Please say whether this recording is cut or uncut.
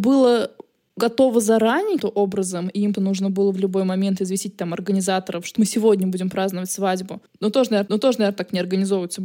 cut